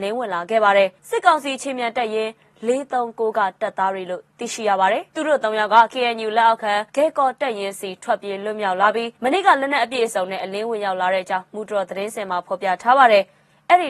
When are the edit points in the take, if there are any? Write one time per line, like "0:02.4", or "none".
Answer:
0:01.0
0:05.1
0:06.9
0:09.2